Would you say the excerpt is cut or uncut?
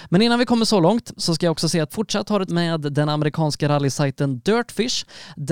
cut